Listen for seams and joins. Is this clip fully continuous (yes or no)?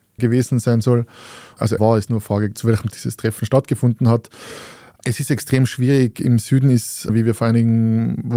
no